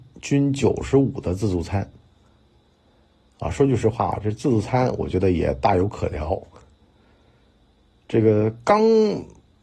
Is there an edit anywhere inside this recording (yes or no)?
no